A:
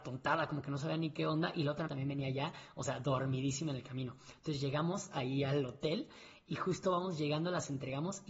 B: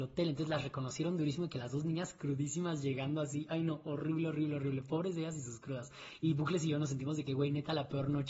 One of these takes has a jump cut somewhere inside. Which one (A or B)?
A